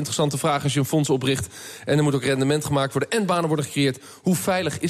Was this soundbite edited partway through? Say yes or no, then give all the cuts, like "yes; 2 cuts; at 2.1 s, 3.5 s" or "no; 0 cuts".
no; 0 cuts